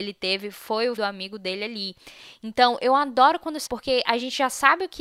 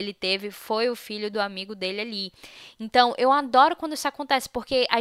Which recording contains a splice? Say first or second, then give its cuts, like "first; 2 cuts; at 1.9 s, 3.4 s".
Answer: first; 2 cuts; at 1.0 s, 3.7 s